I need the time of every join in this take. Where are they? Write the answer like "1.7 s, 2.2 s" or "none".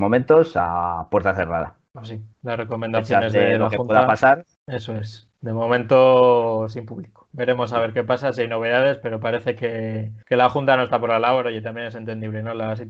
1.9 s, 2.3 s, 4.6 s, 10.2 s